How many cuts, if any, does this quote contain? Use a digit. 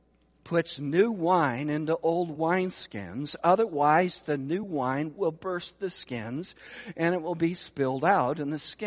0